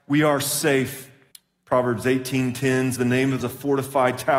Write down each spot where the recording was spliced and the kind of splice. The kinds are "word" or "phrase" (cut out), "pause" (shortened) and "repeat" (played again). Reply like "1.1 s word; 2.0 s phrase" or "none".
1.3 s pause; 3.0 s word; 3.4 s phrase